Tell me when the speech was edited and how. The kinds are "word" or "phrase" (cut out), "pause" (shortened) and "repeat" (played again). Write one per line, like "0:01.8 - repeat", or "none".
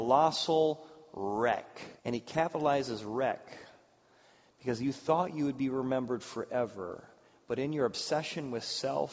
0:02.0 - pause